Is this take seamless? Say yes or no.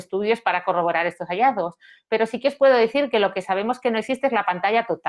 yes